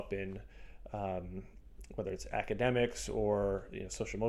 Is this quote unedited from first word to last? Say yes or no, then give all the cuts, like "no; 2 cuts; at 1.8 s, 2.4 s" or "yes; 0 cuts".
yes; 0 cuts